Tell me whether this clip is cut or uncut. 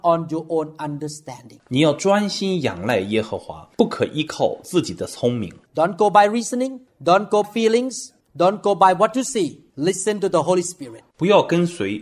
cut